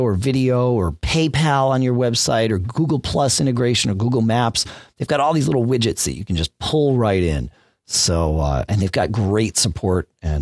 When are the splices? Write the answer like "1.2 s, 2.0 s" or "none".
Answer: none